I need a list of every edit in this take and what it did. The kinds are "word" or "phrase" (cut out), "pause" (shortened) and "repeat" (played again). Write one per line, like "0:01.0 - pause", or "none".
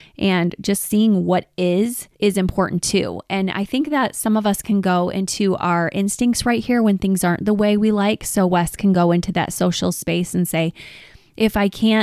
0:02.1 - pause